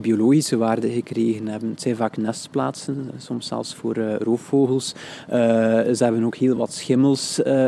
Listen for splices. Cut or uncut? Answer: uncut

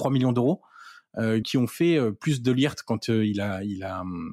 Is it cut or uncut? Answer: cut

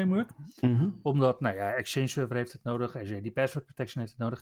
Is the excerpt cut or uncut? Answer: uncut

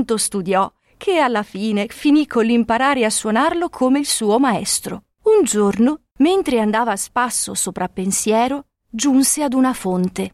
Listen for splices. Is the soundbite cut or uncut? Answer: cut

